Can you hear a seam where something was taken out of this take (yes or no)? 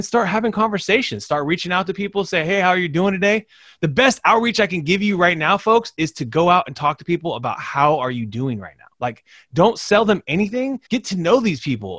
yes